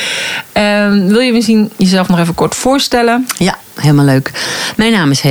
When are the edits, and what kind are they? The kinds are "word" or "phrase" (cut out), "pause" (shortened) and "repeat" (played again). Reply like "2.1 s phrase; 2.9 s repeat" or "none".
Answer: none